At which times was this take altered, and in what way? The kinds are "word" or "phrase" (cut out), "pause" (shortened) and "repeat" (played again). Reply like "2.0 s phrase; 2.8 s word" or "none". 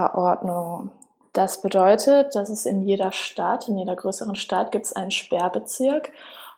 none